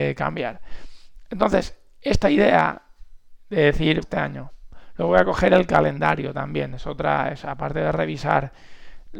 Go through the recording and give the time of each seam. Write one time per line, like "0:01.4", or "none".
0:04.0